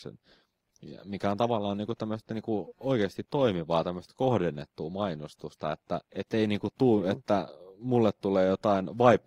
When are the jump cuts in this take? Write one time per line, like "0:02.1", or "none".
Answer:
0:06.0